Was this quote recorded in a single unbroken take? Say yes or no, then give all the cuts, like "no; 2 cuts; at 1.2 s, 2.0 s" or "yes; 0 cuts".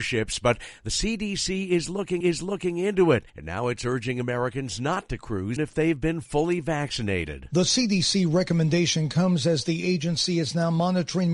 no; 3 cuts; at 2.2 s, 3.3 s, 5.6 s